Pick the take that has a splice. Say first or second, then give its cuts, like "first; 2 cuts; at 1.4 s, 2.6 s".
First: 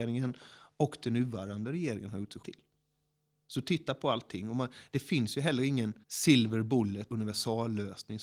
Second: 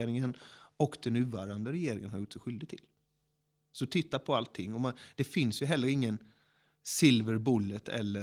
first; 3 cuts; at 2.4 s, 6.0 s, 7.1 s